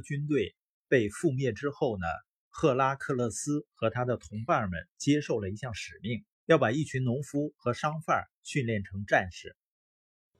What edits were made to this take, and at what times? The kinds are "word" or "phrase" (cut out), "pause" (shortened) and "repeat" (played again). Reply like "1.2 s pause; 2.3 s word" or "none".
6.3 s pause